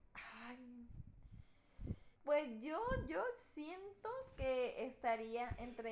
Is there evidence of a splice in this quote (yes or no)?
yes